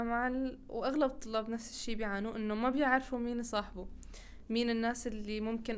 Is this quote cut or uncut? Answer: uncut